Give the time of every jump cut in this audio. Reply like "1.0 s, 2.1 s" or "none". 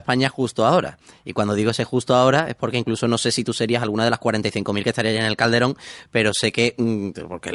none